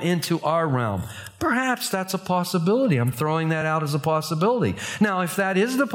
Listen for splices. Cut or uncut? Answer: uncut